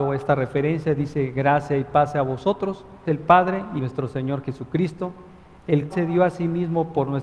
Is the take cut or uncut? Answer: cut